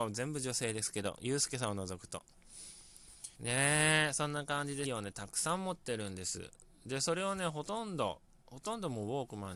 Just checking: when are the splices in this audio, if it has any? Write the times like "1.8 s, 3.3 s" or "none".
3.3 s, 4.8 s, 8.4 s